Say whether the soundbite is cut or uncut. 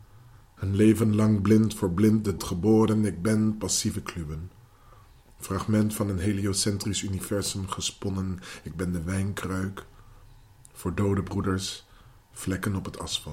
cut